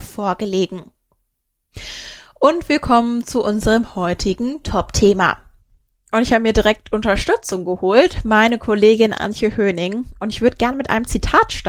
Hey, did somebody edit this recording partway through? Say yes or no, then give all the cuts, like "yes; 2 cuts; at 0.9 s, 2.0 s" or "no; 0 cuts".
no; 0 cuts